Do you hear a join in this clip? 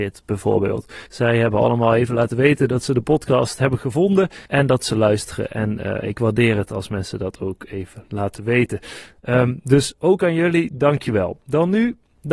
yes; 2 cuts; at 1.1 s, 4.5 s

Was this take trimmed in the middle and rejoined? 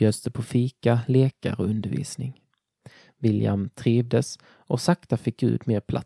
no; 0 cuts

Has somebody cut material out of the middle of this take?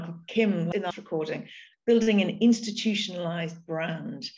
yes; 2 cuts; at 0.9 s, 1.7 s

